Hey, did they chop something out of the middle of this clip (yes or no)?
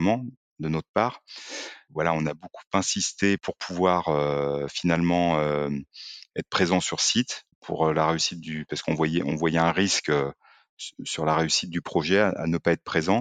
yes